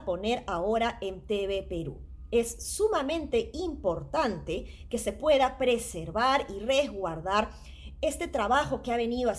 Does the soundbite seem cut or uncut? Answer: uncut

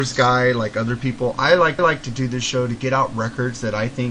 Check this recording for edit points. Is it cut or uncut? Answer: cut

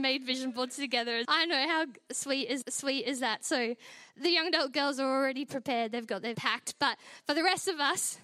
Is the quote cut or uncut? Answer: cut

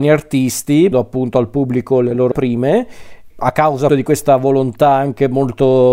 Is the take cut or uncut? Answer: cut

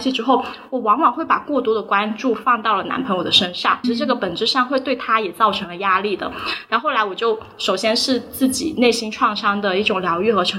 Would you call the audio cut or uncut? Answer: cut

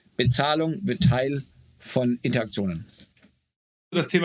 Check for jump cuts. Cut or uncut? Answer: uncut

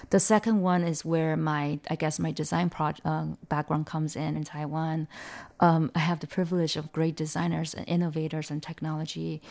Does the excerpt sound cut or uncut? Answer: cut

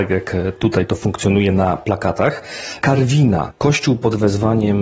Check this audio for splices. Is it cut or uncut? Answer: uncut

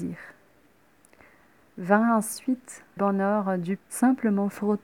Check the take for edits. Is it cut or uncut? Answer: cut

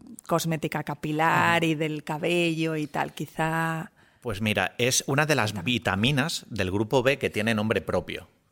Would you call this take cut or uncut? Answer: uncut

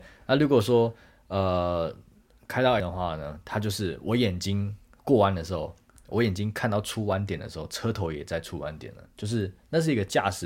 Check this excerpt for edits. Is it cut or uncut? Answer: cut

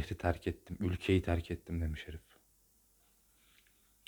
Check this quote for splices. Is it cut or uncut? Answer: uncut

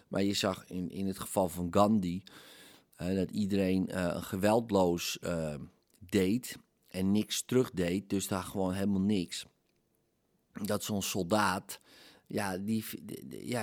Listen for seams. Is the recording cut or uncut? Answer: uncut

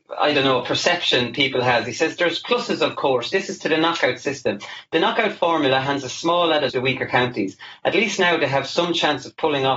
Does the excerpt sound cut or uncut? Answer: cut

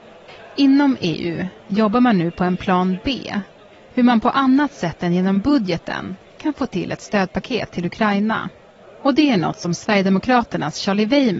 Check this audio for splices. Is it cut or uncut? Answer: uncut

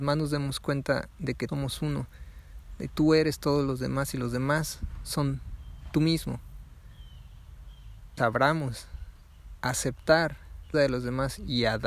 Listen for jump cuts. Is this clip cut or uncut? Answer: cut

